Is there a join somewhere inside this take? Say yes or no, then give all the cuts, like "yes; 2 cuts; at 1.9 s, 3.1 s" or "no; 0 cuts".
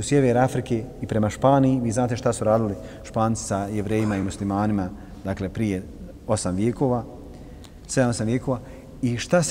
no; 0 cuts